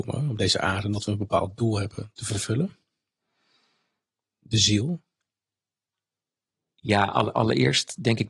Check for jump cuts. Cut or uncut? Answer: uncut